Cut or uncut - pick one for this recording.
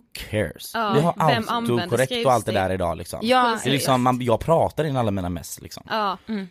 uncut